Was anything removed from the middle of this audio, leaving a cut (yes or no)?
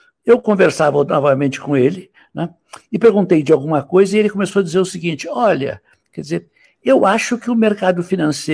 no